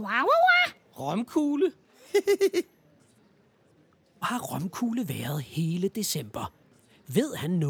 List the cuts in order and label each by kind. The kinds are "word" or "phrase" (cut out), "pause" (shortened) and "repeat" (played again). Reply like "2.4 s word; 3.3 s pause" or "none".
4.2 s word